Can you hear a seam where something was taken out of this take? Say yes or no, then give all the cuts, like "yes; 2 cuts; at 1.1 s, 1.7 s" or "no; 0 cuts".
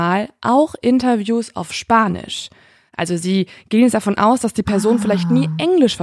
no; 0 cuts